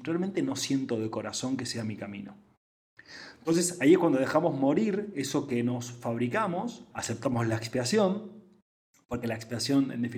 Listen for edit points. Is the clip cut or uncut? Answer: cut